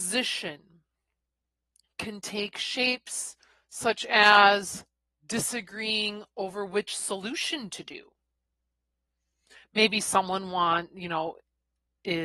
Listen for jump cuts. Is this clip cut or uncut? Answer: uncut